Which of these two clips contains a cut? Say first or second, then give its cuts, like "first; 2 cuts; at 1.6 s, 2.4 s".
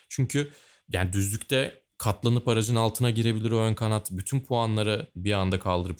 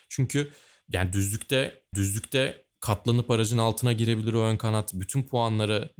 second; 1 cut; at 1.9 s